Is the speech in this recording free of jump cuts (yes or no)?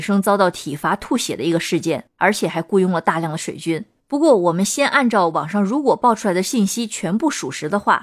yes